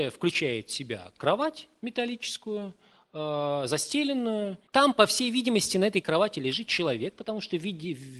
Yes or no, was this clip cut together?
yes